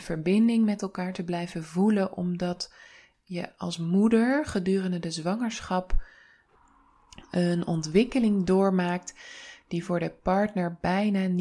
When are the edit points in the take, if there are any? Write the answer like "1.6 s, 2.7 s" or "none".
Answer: none